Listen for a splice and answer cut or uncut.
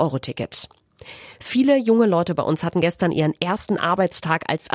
uncut